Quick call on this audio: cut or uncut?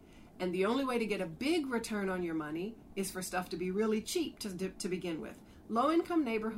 uncut